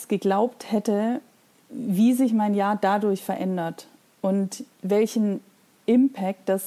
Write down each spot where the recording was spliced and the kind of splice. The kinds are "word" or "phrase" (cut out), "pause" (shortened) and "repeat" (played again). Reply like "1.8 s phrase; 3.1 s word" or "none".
4.7 s pause